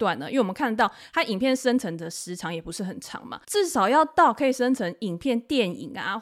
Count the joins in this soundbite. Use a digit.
1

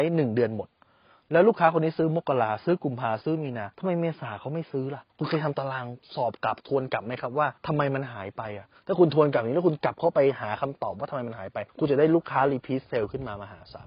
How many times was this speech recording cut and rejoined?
5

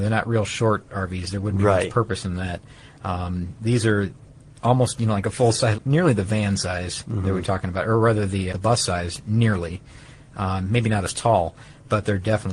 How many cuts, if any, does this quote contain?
2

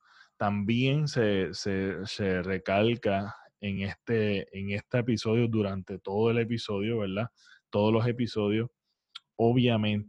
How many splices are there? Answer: 0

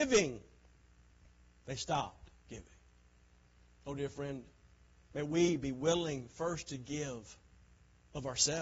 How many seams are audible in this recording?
0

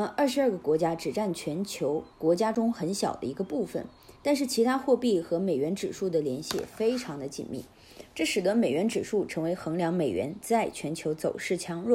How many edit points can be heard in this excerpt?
2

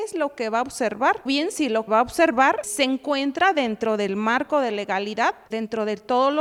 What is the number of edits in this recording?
4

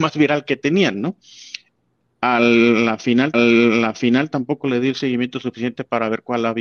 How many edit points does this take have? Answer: 1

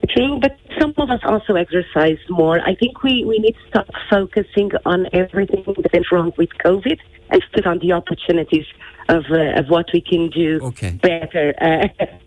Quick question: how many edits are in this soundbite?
1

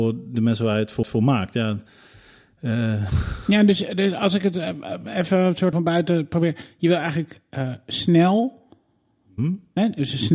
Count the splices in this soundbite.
2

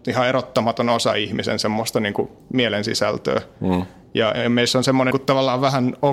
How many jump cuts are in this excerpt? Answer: 1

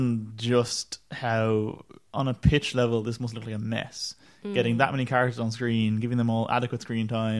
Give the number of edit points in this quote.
0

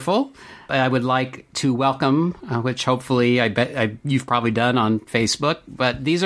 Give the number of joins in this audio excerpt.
1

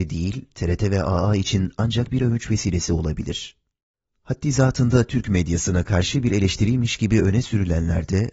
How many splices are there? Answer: 0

